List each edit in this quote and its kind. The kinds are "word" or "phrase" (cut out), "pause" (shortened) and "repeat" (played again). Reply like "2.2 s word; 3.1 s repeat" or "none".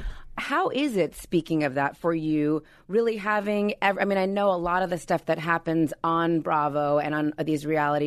none